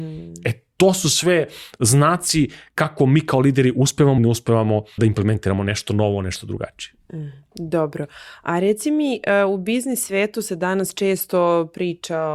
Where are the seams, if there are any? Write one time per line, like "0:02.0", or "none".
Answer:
0:04.2
0:05.0